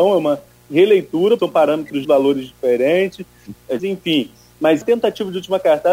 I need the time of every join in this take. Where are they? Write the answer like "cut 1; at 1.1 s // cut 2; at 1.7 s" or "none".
cut 1; at 1.4 s // cut 2; at 2.0 s // cut 3; at 3.8 s // cut 4; at 4.8 s